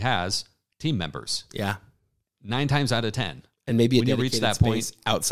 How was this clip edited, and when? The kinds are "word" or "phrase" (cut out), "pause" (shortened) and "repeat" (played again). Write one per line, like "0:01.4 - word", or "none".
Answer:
none